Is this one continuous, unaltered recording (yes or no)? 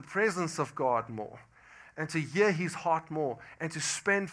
yes